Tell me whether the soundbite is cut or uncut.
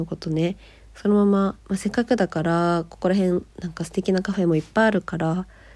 cut